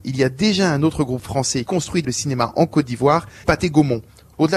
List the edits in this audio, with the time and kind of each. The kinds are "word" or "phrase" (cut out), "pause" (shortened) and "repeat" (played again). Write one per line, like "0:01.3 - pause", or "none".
0:01.7 - word
0:02.0 - word
0:03.4 - word